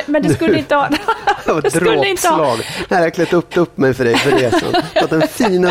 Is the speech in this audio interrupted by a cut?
yes; 1 cut; at 3.5 s

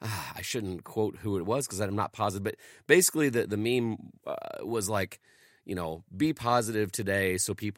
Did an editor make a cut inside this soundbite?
no; 0 cuts

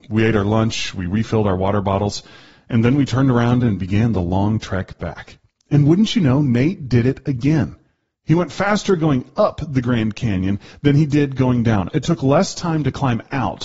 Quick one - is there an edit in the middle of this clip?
no; 0 cuts

